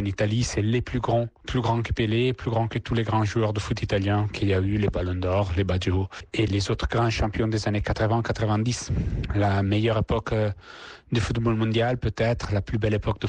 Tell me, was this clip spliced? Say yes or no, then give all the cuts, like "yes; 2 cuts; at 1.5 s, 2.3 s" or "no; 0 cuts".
yes; 1 cut; at 6.5 s